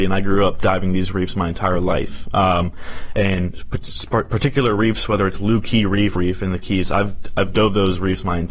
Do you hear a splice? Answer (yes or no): yes